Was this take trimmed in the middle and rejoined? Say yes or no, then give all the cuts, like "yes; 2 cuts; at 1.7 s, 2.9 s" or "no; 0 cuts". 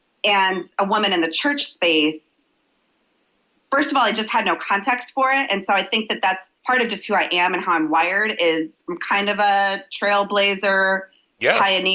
yes; 1 cut; at 6.6 s